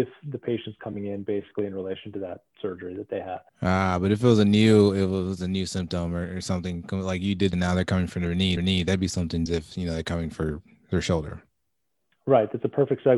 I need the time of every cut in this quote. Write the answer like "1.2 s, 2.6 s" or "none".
3.5 s, 7.5 s, 8.6 s, 9.5 s